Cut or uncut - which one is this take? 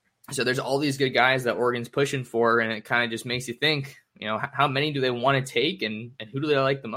uncut